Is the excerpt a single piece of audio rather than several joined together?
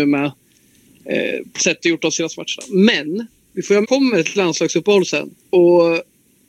no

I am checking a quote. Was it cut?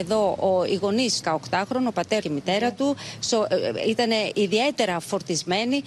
yes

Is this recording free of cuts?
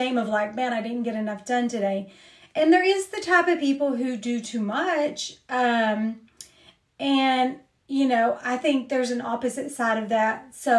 yes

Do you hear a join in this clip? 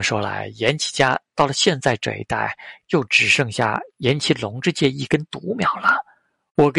no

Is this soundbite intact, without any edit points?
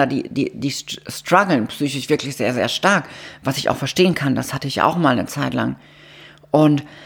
yes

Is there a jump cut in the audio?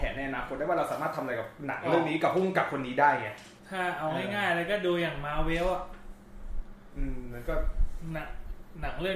yes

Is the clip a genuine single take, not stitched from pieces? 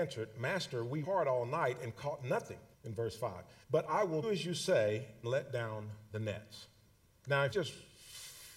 no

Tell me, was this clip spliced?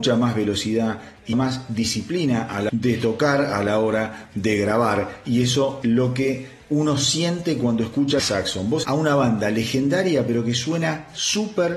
yes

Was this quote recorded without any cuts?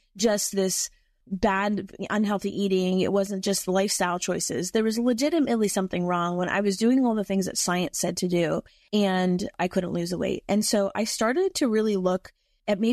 yes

